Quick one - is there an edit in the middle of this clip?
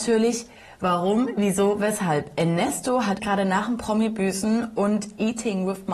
yes; 1 cut; at 3.2 s

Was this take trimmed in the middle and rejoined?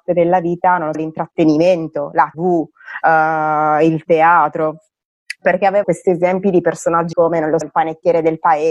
yes; 5 cuts; at 0.9 s, 2.3 s, 5.8 s, 7.1 s, 7.6 s

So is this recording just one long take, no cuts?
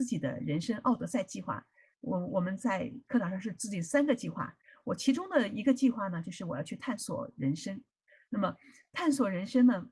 yes; 0 cuts

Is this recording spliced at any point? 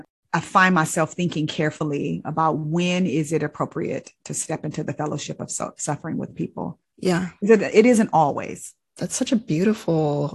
no; 0 cuts

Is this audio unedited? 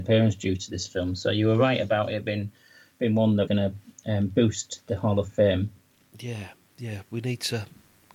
no; 1 cut; at 3.5 s

